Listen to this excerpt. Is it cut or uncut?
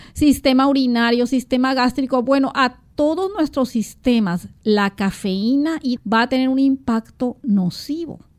cut